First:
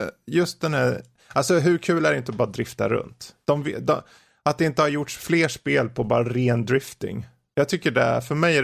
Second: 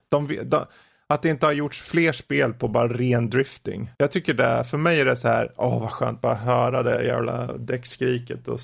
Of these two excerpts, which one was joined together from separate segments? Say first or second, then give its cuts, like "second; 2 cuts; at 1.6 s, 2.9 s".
second; 1 cut; at 3.9 s